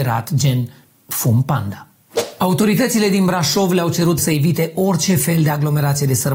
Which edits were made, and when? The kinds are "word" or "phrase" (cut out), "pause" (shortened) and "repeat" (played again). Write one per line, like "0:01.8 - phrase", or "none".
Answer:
0:04.2 - word